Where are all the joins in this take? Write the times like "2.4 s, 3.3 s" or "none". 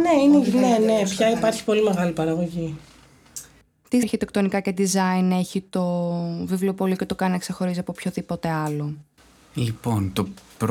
4.0 s